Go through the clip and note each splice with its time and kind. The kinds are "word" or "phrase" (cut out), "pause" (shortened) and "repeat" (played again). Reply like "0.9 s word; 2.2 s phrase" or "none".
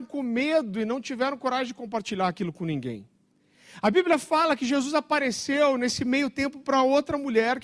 none